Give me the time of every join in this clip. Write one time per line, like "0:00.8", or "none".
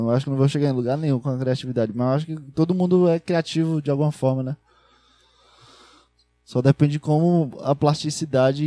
none